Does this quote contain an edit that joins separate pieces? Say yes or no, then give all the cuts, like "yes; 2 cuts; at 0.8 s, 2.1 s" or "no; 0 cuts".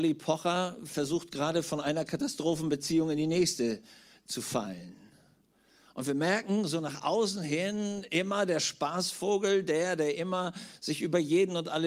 no; 0 cuts